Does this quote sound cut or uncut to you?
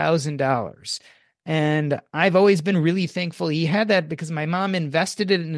uncut